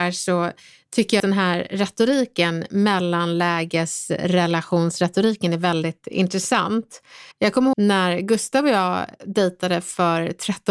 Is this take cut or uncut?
cut